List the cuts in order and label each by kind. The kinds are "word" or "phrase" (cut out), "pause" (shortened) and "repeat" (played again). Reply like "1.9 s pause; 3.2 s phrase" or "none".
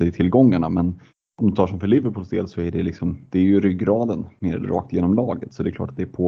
1.1 s pause; 4.6 s word